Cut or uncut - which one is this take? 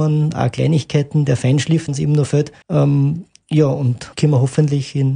cut